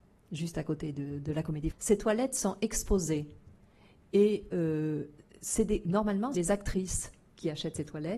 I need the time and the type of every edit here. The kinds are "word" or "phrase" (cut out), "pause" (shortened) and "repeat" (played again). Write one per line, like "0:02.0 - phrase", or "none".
0:01.7 - word
0:06.3 - word